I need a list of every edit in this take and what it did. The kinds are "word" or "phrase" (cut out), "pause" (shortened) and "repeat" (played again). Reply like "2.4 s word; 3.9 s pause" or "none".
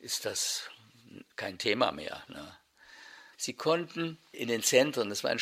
none